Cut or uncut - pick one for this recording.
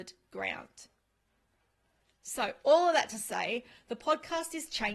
uncut